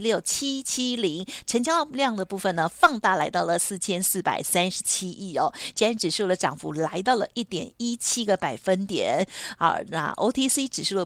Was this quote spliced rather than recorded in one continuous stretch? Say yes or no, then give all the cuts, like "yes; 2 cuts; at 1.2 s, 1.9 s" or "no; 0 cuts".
no; 0 cuts